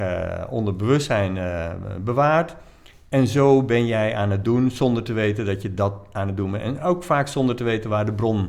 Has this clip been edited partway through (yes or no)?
no